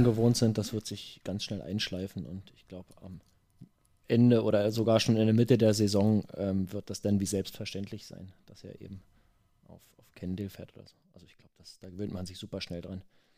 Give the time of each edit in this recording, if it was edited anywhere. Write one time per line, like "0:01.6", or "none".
none